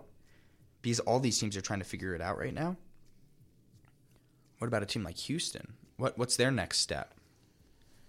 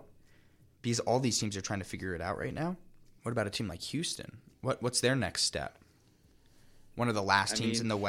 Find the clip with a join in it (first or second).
second